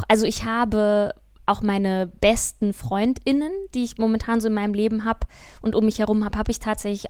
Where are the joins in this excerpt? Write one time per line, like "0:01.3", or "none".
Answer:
none